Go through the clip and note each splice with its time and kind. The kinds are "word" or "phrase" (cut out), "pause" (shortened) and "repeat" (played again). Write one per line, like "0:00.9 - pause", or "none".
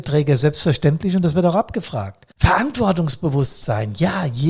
0:02.3 - pause